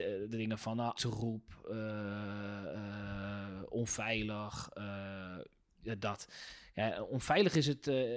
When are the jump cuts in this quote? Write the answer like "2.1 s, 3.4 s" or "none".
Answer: 0.9 s

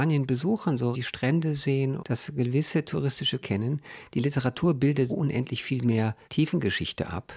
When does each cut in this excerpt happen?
0.9 s, 2.0 s, 3.4 s, 5.1 s, 6.2 s

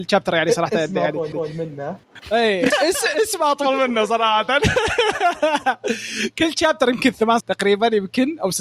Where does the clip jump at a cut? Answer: 1.3 s, 2.7 s, 7.4 s

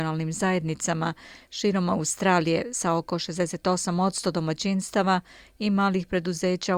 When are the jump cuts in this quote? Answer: none

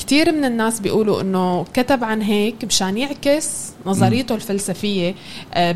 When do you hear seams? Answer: none

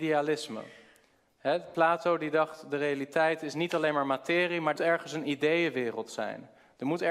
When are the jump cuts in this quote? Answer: 4.8 s

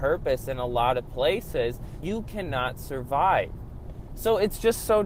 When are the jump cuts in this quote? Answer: 2.0 s

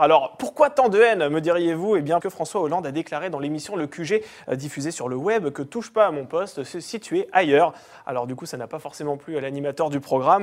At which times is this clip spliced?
2.2 s

